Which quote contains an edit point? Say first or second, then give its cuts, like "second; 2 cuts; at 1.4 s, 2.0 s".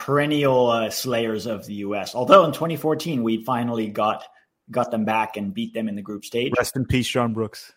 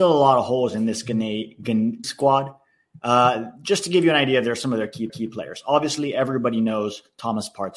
second; 2 cuts; at 2.0 s, 5.1 s